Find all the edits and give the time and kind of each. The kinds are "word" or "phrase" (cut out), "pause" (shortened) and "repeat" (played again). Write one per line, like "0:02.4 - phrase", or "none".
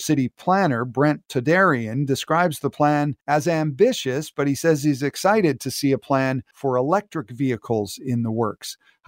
0:03.2 - pause
0:06.5 - pause